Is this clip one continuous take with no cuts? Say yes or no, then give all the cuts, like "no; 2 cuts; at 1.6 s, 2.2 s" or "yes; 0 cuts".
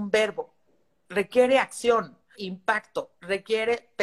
no; 1 cut; at 2.3 s